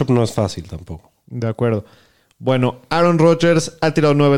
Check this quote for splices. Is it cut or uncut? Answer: uncut